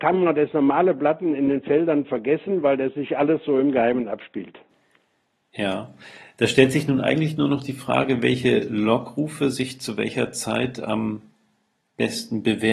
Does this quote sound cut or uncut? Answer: uncut